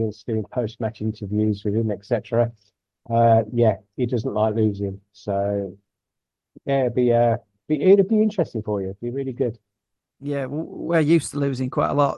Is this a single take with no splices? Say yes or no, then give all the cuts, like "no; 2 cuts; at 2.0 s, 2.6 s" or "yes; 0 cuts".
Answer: yes; 0 cuts